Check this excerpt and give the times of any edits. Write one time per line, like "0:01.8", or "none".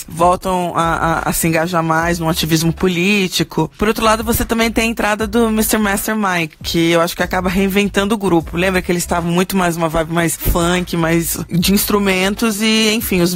none